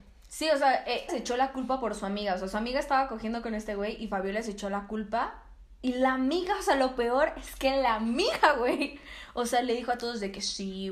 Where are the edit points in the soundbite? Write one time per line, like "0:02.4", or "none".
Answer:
0:01.1